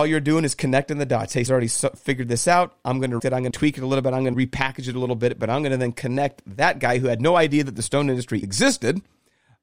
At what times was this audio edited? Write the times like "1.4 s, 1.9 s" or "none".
1.5 s, 3.2 s, 3.5 s, 4.3 s, 8.4 s